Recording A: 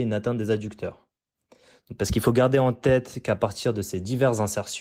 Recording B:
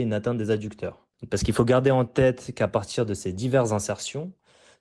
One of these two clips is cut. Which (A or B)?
B